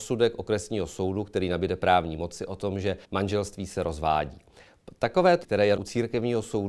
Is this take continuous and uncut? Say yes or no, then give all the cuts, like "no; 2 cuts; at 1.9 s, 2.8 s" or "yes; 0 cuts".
no; 3 cuts; at 3.0 s, 5.4 s, 5.8 s